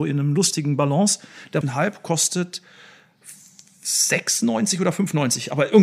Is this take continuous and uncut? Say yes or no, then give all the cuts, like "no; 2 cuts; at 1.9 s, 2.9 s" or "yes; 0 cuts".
no; 1 cut; at 1.6 s